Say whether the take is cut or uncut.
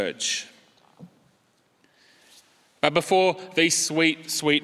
uncut